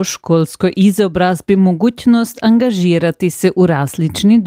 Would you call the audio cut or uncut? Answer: uncut